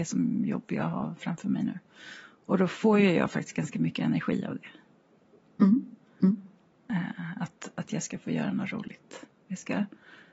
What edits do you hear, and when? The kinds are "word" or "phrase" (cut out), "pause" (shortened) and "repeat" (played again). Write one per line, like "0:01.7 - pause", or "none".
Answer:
none